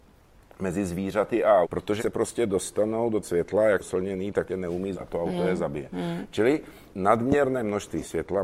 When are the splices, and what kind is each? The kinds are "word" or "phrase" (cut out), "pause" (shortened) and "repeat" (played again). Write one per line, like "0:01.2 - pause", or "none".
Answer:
0:01.6 - word
0:02.0 - word
0:03.2 - word
0:03.8 - word
0:04.5 - word
0:04.9 - word
0:06.9 - word